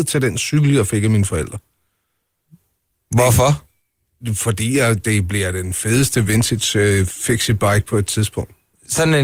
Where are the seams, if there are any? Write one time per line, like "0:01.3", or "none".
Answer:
none